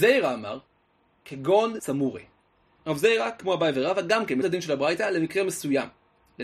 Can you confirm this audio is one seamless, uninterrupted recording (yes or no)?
no